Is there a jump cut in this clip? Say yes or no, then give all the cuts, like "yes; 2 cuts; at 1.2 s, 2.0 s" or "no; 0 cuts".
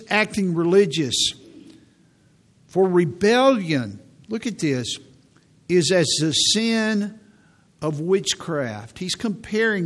no; 0 cuts